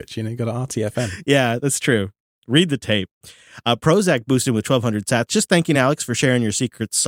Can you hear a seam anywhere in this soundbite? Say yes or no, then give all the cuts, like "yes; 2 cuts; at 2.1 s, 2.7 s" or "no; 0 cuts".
no; 0 cuts